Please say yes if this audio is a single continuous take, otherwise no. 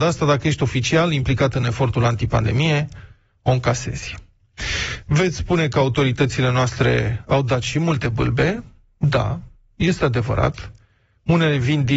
yes